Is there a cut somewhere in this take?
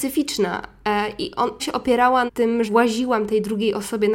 yes; 3 cuts; at 1.6 s, 2.3 s, 2.6 s

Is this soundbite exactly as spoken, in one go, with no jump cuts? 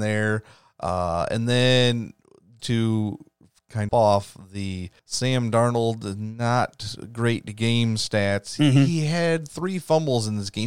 no; 3 cuts; at 2.6 s, 3.9 s, 5.0 s

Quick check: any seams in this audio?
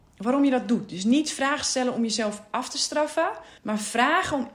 yes; 1 cut; at 3.6 s

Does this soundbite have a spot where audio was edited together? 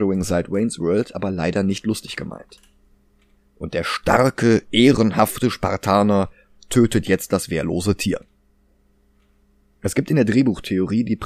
no; 0 cuts

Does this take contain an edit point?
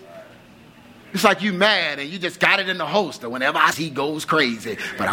yes; 1 cut; at 3.7 s

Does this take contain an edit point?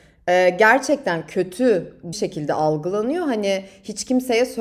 yes; 1 cut; at 2.1 s

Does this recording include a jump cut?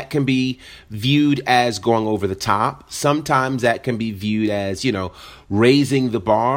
no; 0 cuts

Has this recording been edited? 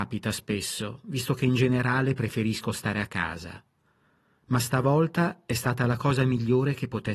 no; 0 cuts

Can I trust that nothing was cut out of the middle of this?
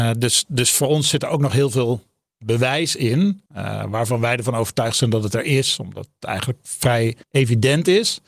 no; 2 cuts; at 3.5 s, 7.2 s

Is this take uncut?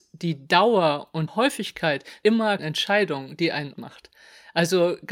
no; 4 cuts; at 1.3 s, 2.2 s, 2.6 s, 3.7 s

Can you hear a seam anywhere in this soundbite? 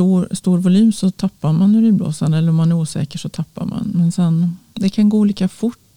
no; 0 cuts

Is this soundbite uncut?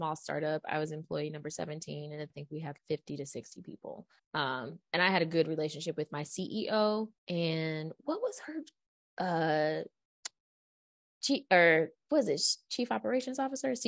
no; 4 cuts; at 2.3 s, 2.8 s, 4.2 s, 7.2 s

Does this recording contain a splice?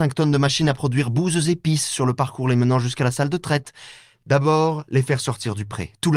no; 0 cuts

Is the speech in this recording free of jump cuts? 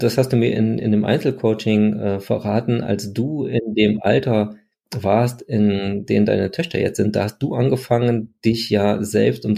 yes; 0 cuts

